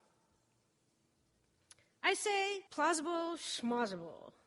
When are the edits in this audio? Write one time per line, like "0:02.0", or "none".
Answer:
0:02.7